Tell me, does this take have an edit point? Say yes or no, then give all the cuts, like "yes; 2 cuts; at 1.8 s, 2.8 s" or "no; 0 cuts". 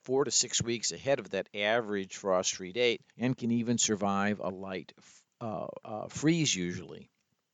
yes; 1 cut; at 3.1 s